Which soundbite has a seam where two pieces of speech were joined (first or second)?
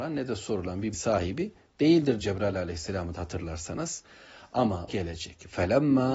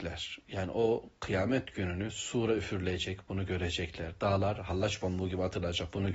first